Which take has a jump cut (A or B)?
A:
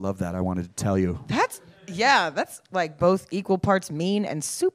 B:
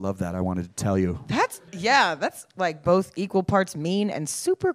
B